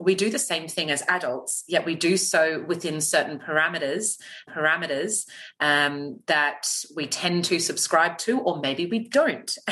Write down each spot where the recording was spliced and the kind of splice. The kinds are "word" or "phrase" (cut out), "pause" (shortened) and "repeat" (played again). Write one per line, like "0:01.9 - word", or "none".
0:04.5 - repeat